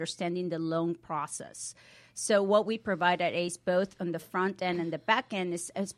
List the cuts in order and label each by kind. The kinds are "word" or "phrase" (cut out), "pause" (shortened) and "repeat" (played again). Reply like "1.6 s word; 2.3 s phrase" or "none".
none